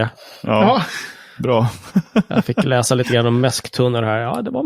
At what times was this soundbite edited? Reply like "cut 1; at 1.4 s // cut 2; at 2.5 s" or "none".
none